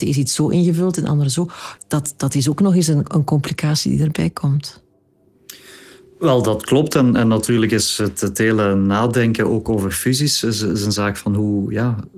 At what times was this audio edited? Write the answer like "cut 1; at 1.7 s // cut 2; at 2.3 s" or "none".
none